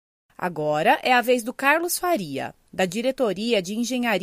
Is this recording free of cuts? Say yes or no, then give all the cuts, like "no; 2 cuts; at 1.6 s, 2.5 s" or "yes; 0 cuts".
yes; 0 cuts